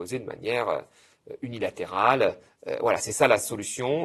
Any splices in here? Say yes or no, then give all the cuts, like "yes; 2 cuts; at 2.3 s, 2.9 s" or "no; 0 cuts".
no; 0 cuts